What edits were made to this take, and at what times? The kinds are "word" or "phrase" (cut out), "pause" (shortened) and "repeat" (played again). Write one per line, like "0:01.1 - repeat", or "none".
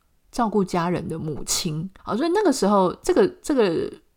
0:02.0 - pause